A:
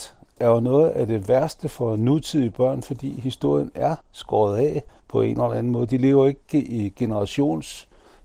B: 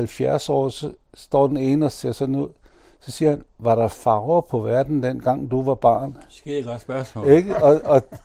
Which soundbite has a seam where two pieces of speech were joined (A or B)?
A